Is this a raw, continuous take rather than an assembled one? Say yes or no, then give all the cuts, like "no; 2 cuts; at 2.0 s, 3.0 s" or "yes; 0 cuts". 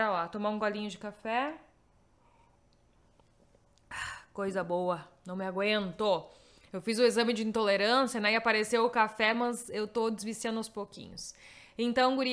yes; 0 cuts